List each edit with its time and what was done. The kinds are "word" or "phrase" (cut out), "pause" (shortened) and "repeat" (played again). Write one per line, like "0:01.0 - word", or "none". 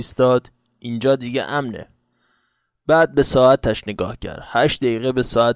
none